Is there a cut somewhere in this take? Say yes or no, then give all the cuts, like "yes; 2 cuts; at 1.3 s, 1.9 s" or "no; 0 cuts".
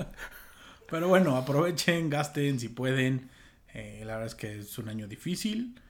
no; 0 cuts